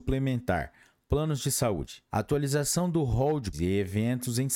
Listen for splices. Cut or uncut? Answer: cut